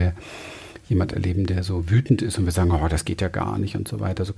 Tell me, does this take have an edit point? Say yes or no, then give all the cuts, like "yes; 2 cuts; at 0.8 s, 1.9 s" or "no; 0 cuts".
no; 0 cuts